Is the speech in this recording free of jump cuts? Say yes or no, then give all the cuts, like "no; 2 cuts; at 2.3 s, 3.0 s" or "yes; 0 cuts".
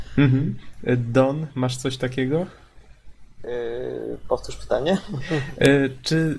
yes; 0 cuts